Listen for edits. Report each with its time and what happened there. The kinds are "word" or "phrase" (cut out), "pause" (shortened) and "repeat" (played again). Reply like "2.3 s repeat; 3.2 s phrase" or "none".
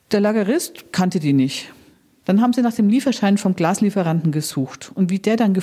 none